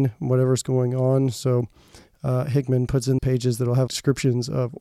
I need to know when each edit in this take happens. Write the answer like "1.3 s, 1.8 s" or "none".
3.2 s, 3.9 s